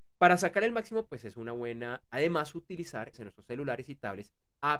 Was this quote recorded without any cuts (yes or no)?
no